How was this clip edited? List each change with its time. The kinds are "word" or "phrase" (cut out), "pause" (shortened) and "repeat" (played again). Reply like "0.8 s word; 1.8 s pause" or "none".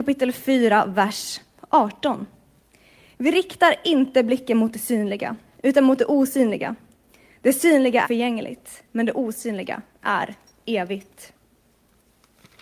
8.0 s word